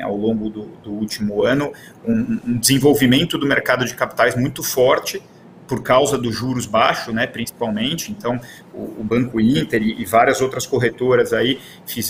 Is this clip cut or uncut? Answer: uncut